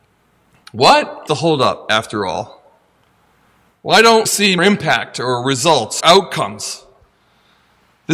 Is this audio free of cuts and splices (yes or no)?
no